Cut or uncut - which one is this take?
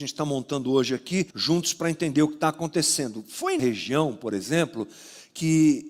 cut